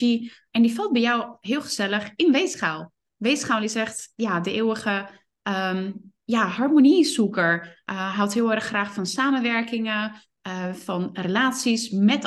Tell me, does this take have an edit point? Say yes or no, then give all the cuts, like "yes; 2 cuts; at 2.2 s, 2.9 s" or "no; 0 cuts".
no; 0 cuts